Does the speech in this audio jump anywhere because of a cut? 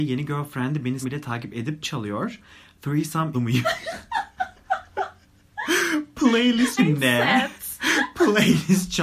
yes; 4 cuts; at 1.0 s, 1.8 s, 3.3 s, 6.8 s

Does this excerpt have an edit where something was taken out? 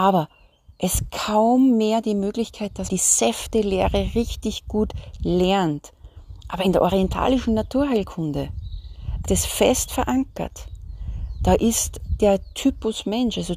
yes; 3 cuts; at 1.1 s, 2.9 s, 9.3 s

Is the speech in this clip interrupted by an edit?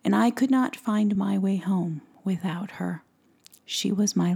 no; 0 cuts

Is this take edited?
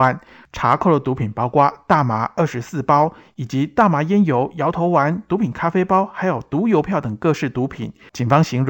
no; 0 cuts

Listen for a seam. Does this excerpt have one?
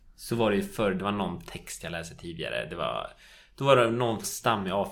no; 0 cuts

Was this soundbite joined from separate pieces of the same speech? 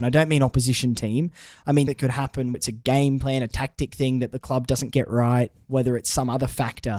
yes; 3 cuts; at 1.9 s, 2.5 s, 4.9 s

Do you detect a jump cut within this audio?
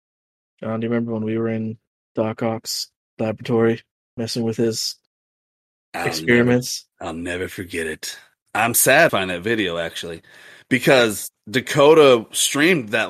yes; 1 cut; at 9.1 s

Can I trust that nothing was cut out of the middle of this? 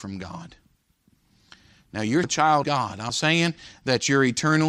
no; 3 cuts; at 2.2 s, 2.6 s, 3.1 s

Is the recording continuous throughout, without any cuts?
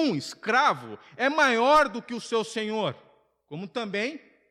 yes; 0 cuts

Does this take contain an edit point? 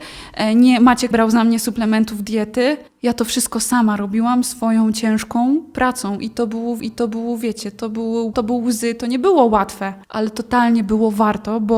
yes; 5 cuts; at 1.1 s, 2.9 s, 6.8 s, 8.3 s, 10.0 s

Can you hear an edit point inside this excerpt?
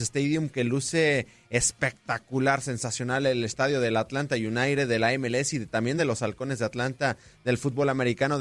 no; 0 cuts

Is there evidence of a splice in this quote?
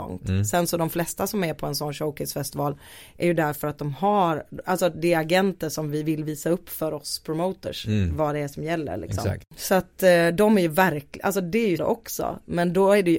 yes; 1 cut; at 11.8 s

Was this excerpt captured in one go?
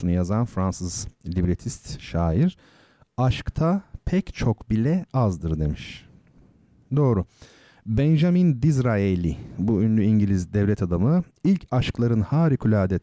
yes; 0 cuts

